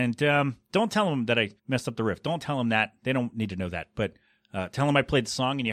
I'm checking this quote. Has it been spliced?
yes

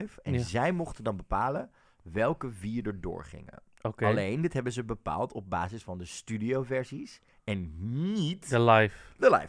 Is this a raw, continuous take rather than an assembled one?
yes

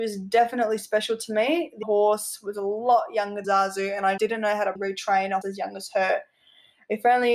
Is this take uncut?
no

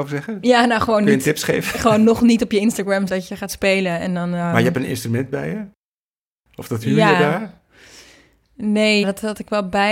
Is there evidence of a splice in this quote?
yes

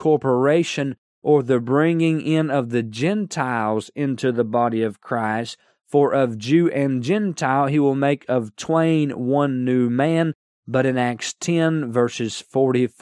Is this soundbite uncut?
yes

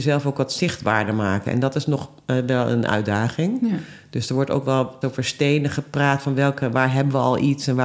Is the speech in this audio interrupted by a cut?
yes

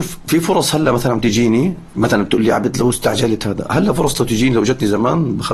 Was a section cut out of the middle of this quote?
no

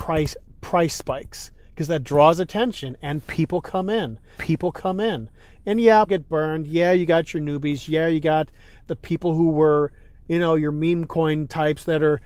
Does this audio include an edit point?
yes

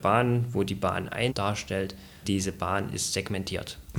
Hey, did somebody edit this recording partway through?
yes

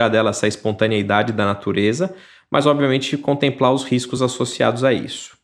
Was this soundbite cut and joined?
no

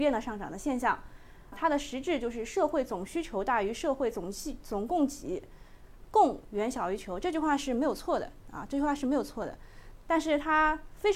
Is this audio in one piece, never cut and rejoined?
no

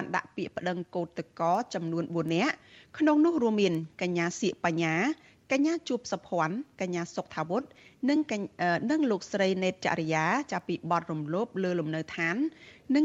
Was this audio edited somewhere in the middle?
no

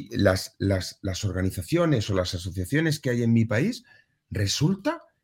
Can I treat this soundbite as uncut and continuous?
yes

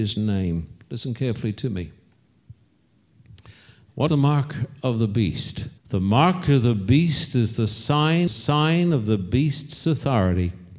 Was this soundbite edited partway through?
yes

